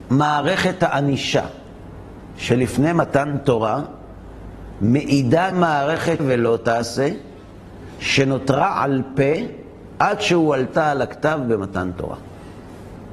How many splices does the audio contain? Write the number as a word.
two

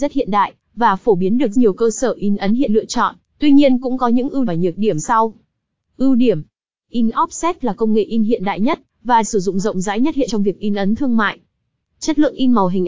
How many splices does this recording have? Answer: seven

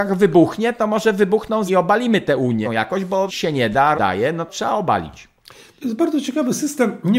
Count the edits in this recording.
five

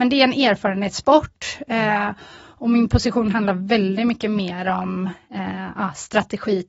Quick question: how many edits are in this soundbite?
zero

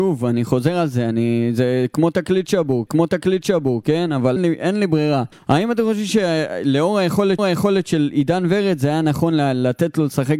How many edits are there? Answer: four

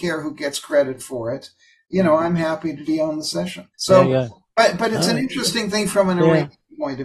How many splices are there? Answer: two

